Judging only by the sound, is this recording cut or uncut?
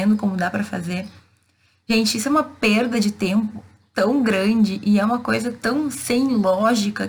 uncut